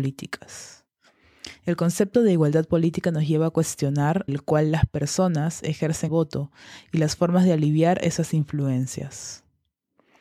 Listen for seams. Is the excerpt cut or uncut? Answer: cut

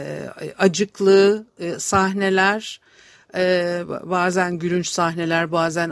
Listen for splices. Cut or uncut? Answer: uncut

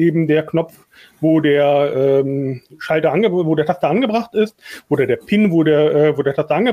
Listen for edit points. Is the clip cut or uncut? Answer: uncut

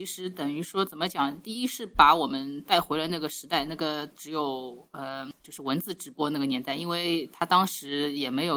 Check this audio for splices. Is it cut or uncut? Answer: uncut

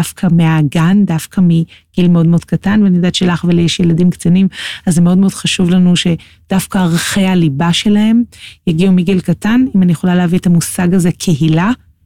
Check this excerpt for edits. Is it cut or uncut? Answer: uncut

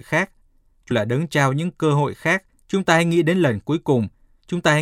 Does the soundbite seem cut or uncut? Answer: cut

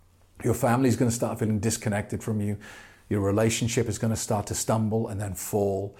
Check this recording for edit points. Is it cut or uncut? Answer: uncut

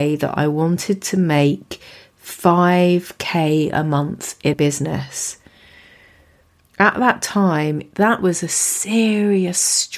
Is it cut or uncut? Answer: cut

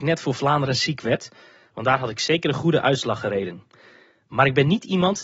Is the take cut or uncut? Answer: uncut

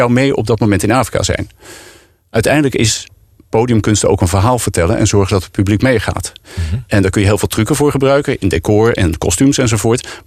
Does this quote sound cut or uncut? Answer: uncut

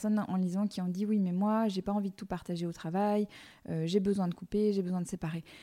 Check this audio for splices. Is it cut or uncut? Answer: uncut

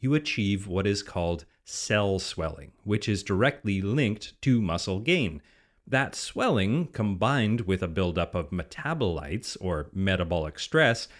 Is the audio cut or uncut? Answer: uncut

